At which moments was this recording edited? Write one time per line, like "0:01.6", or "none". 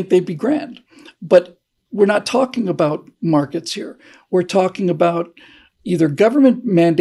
none